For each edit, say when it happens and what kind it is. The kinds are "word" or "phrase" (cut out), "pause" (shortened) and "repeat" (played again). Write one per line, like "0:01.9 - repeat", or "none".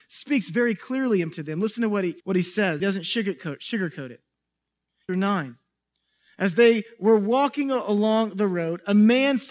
0:01.3 - word
0:02.2 - pause
0:02.8 - phrase
0:05.1 - phrase